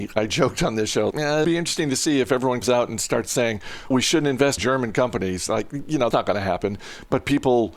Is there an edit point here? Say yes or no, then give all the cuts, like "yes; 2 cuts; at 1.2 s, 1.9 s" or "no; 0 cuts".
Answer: yes; 6 cuts; at 1.1 s, 1.4 s, 2.6 s, 3.9 s, 4.6 s, 6.1 s